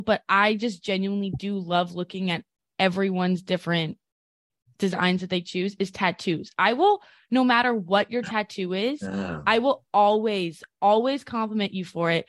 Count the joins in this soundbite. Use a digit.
0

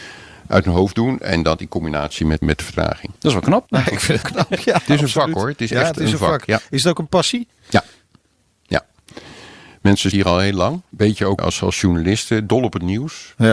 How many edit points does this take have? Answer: 7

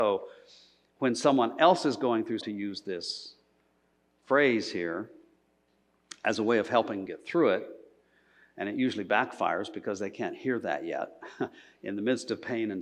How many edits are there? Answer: 2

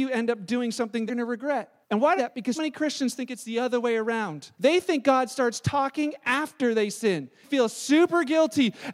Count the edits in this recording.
6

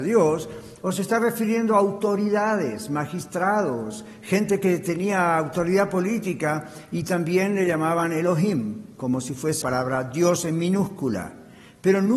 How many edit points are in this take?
1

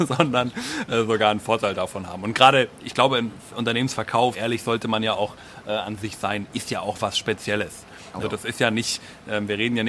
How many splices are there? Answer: 2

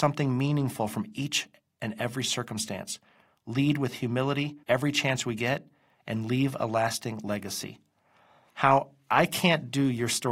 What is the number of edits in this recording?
1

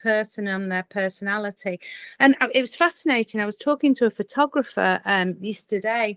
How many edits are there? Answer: 0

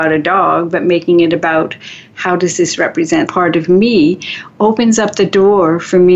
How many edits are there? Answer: 1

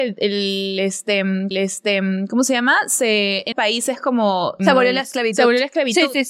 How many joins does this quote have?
3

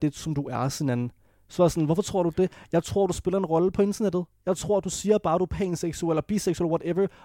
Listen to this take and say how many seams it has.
0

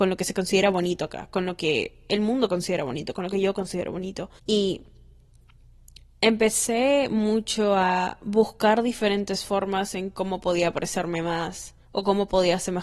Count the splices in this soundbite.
2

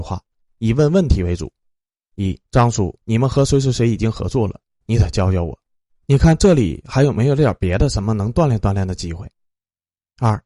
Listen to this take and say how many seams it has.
2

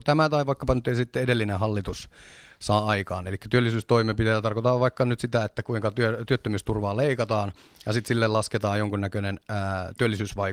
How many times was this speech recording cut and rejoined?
0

